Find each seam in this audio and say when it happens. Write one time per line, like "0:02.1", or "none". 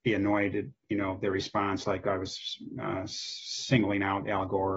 none